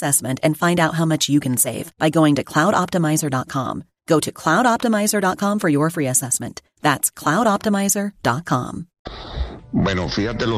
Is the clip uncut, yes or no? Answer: yes